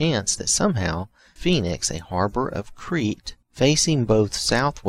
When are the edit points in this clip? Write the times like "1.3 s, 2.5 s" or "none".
1.4 s, 3.4 s